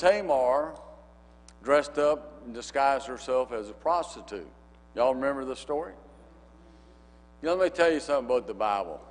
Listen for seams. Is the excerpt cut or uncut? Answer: uncut